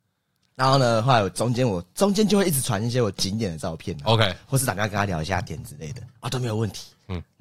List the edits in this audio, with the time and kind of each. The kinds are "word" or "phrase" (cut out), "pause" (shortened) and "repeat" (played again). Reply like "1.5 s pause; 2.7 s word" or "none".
6.2 s pause